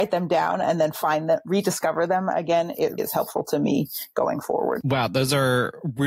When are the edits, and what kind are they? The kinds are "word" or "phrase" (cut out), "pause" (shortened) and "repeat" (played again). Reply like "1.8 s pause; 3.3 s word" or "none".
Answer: 3.0 s word